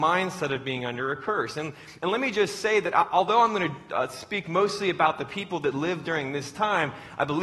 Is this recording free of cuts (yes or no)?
yes